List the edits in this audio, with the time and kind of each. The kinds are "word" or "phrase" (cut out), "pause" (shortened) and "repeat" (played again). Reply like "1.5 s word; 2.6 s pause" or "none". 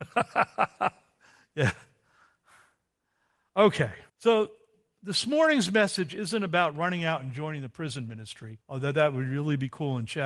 4.1 s pause; 8.6 s pause